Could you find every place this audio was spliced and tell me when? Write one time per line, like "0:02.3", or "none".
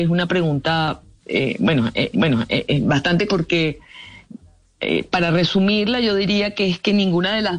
0:01.2
0:02.1
0:03.3